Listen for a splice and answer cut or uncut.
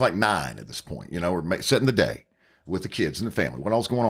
uncut